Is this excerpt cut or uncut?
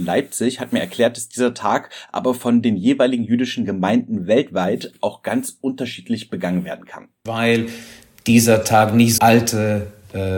cut